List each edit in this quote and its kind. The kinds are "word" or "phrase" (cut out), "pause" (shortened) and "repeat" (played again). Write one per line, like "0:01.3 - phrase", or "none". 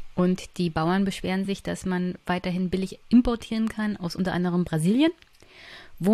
none